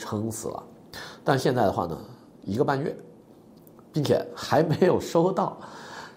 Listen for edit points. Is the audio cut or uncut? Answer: uncut